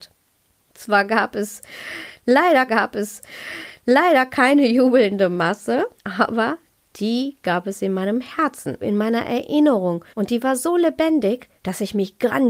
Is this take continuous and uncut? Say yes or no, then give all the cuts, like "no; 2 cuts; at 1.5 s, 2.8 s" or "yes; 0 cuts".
no; 5 cuts; at 2.7 s, 6.0 s, 8.8 s, 10.1 s, 11.6 s